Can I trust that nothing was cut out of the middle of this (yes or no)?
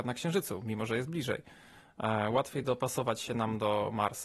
yes